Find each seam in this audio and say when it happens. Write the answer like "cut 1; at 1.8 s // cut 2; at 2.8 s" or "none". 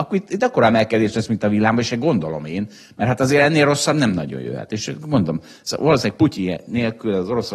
none